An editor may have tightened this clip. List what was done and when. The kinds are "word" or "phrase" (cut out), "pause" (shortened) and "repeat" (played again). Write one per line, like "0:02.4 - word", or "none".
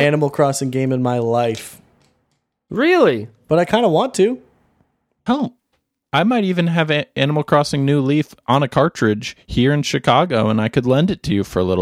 none